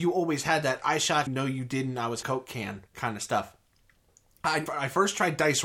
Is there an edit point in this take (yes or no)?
yes